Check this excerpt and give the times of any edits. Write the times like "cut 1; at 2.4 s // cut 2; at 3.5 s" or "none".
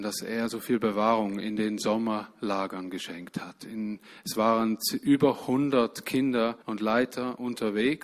cut 1; at 6.6 s